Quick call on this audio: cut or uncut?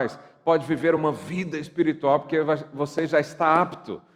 uncut